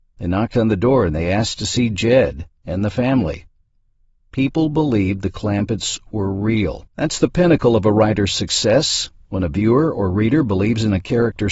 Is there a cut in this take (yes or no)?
yes